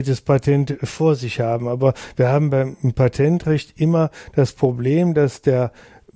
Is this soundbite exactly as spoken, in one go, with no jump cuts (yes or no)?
yes